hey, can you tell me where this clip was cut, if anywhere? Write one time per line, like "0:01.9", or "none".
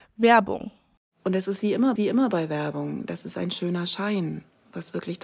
0:02.0